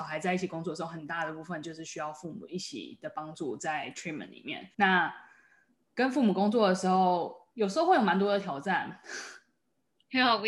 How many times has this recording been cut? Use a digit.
2